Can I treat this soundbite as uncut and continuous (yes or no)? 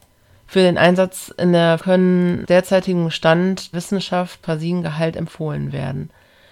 no